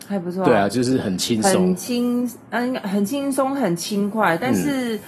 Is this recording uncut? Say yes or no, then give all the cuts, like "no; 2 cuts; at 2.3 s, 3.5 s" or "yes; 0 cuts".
yes; 0 cuts